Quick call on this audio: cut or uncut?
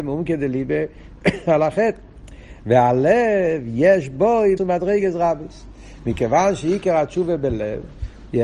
cut